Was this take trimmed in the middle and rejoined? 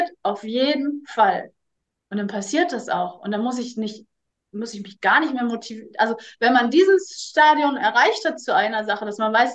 no; 0 cuts

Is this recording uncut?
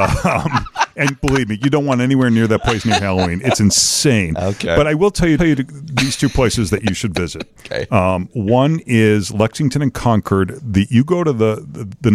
no; 1 cut; at 5.4 s

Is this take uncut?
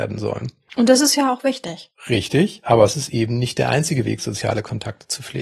yes; 0 cuts

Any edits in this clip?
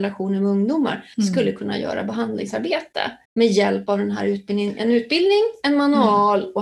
yes; 2 cuts; at 1.1 s, 3.2 s

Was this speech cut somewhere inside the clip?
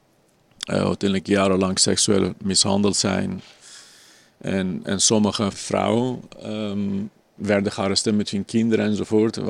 no; 0 cuts

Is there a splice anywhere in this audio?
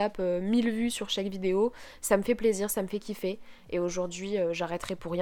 no; 0 cuts

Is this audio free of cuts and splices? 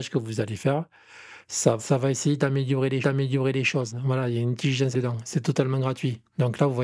no; 3 cuts; at 1.8 s, 3.0 s, 4.9 s

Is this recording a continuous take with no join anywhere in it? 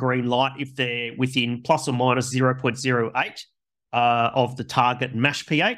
yes; 0 cuts

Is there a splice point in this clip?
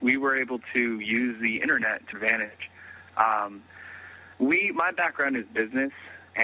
yes; 2 cuts; at 2.1 s, 4.3 s

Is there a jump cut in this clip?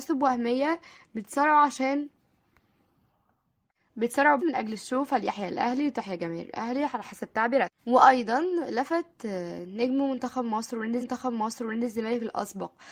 yes; 3 cuts; at 4.4 s, 7.8 s, 11.0 s

